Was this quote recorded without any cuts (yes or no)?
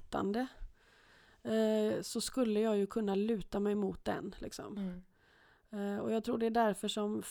yes